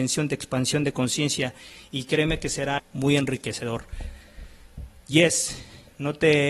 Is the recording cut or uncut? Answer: cut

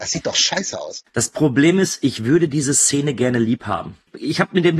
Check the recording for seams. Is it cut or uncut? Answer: uncut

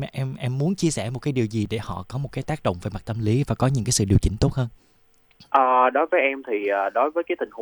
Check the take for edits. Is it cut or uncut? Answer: uncut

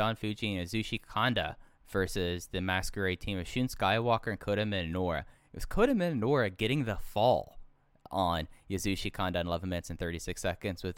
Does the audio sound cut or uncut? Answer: uncut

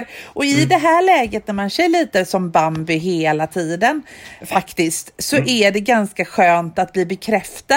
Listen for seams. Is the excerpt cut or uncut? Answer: cut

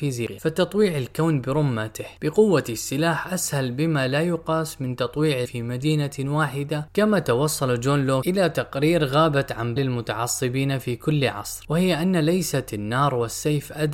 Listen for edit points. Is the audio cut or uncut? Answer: cut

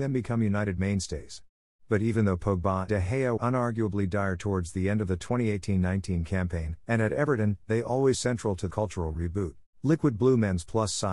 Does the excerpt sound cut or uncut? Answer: cut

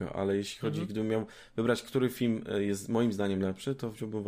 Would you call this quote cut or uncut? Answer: uncut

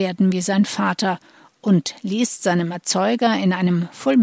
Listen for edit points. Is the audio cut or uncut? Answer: uncut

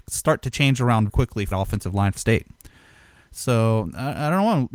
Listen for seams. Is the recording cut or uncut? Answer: cut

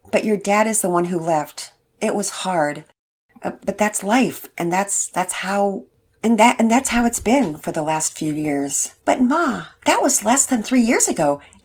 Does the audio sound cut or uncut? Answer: cut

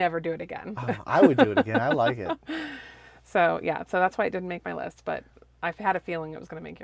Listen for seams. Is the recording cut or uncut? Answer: uncut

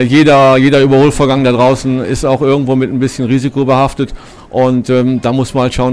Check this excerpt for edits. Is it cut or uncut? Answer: uncut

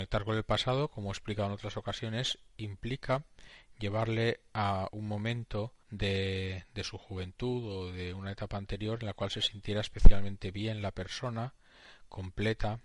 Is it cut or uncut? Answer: cut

